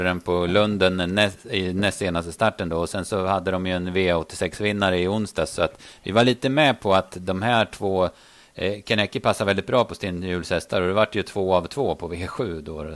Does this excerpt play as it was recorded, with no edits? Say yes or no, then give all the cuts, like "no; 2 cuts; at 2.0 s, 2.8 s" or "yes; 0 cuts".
yes; 0 cuts